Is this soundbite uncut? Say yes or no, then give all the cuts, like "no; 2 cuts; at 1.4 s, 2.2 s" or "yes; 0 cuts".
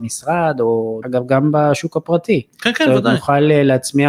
no; 1 cut; at 1.0 s